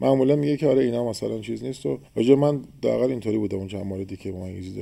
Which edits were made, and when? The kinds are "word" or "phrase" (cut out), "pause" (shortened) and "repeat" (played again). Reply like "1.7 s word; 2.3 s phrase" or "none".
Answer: 2.1 s pause